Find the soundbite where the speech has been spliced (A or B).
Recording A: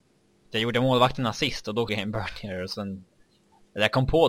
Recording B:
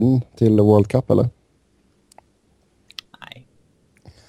A